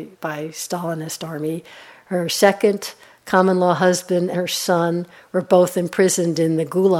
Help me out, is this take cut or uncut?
cut